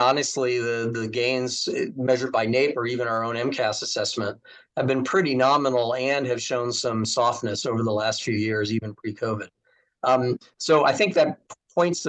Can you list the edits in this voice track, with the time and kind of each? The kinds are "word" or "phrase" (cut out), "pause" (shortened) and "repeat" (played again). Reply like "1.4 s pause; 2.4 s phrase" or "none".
none